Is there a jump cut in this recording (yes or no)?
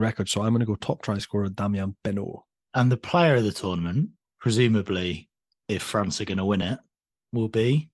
no